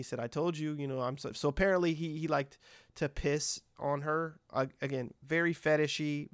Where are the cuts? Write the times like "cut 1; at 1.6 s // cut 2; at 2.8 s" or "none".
none